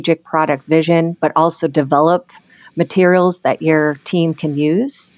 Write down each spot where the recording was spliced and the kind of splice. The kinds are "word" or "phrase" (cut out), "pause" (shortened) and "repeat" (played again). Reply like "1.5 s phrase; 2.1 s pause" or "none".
none